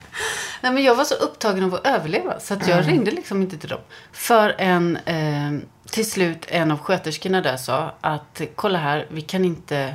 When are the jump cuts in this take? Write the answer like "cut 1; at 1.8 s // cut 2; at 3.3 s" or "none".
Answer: cut 1; at 4.1 s